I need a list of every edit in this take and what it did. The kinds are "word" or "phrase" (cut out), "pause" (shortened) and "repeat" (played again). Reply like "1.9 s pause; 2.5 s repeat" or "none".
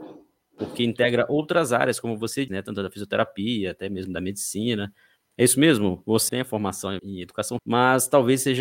2.5 s word; 6.3 s word; 7.0 s word; 7.6 s word